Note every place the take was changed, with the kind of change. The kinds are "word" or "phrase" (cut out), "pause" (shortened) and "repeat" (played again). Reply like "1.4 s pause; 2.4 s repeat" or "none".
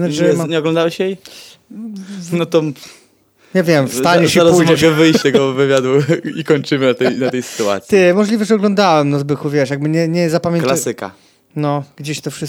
5.2 s word